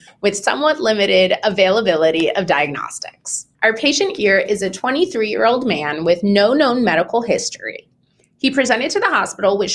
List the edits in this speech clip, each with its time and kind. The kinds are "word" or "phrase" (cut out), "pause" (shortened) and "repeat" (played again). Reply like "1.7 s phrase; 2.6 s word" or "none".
3.5 s pause